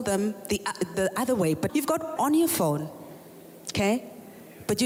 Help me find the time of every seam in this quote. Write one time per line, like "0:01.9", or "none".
0:00.9
0:01.7
0:02.2